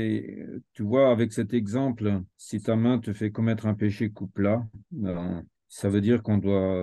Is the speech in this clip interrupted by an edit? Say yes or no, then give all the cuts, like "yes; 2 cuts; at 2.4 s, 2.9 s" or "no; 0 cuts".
yes; 2 cuts; at 2.3 s, 5.5 s